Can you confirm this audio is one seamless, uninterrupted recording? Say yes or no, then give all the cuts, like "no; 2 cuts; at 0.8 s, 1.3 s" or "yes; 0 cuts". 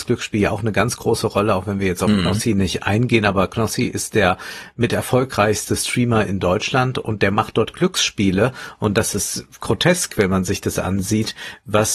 yes; 0 cuts